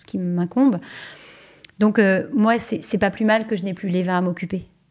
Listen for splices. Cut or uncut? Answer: uncut